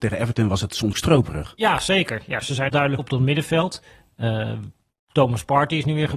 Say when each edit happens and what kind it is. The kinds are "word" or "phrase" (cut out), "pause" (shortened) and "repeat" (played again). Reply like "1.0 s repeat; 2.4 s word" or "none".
0.9 s word; 2.7 s word; 3.0 s word